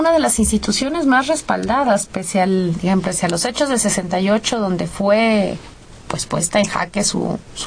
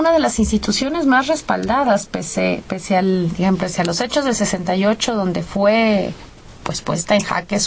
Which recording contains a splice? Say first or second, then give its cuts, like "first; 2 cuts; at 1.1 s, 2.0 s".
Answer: first; 1 cut; at 2.1 s